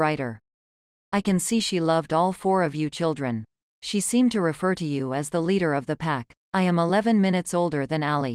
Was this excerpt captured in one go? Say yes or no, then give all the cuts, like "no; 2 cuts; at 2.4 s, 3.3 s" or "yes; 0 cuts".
no; 1 cut; at 6.4 s